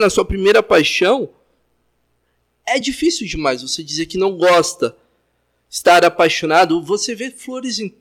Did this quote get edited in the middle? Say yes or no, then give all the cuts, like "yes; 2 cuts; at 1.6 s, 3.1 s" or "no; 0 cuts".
no; 0 cuts